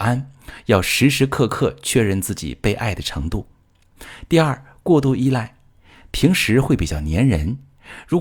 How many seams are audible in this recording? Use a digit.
0